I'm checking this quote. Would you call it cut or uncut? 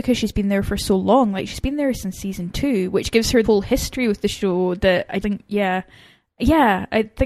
cut